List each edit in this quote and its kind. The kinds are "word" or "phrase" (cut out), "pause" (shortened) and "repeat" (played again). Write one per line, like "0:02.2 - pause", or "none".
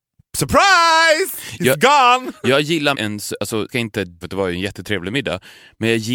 0:02.9 - word
0:03.7 - word
0:04.2 - word